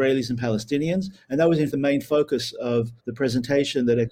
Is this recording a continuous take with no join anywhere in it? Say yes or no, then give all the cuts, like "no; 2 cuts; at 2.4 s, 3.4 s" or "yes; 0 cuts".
no; 2 cuts; at 1.7 s, 3.0 s